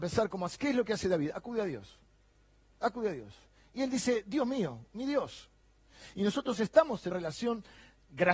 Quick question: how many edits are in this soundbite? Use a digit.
1